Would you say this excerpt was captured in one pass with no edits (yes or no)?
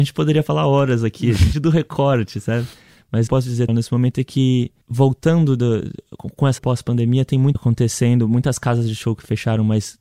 no